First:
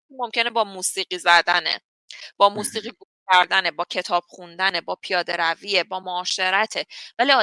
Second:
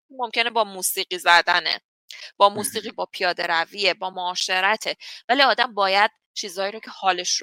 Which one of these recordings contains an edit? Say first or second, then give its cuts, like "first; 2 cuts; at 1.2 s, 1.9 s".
second; 1 cut; at 2.9 s